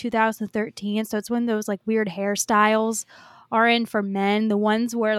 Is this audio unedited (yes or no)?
yes